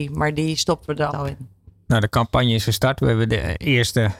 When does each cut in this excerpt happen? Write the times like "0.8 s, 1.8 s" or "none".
1.1 s